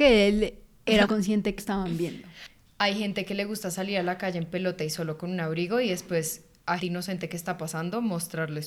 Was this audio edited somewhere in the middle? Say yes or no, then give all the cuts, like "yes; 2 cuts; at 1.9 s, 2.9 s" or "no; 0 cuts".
yes; 3 cuts; at 1.0 s, 1.6 s, 6.8 s